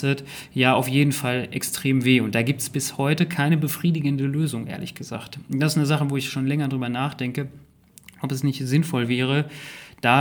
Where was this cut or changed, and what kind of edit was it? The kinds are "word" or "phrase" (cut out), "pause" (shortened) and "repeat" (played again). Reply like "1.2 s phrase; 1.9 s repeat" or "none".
none